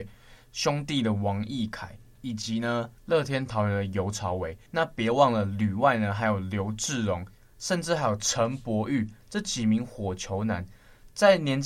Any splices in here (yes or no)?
yes